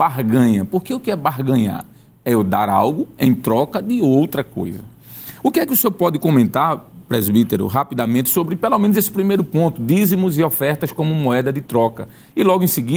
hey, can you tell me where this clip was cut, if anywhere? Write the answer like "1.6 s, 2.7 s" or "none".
none